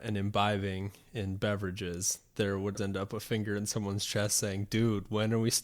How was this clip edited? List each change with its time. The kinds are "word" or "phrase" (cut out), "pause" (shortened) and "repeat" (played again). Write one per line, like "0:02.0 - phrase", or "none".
0:02.8 - word